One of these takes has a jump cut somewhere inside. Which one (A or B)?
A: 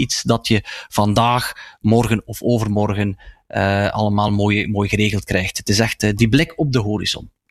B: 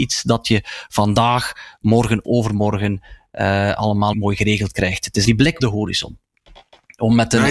B